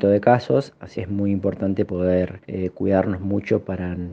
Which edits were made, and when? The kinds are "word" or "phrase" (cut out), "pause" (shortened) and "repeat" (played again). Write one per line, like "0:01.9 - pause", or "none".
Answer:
0:01.0 - word
0:02.4 - pause